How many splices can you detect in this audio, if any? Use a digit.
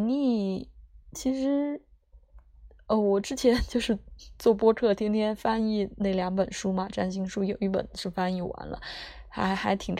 1